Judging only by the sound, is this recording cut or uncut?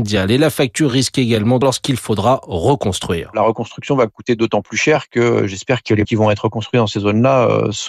cut